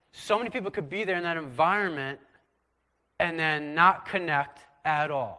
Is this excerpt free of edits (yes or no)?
yes